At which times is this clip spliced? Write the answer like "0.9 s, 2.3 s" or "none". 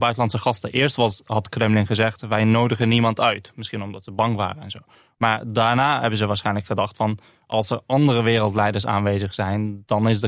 none